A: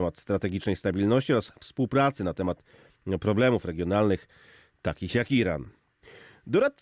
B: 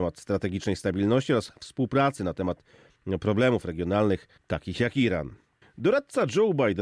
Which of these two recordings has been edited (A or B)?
B